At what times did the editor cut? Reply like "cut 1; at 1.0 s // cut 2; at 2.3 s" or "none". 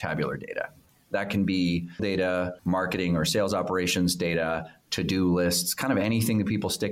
cut 1; at 2.0 s // cut 2; at 2.6 s